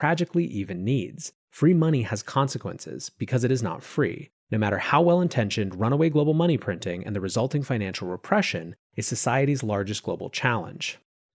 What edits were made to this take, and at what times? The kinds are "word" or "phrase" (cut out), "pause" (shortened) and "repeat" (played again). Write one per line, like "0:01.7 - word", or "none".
0:01.4 - pause
0:04.4 - pause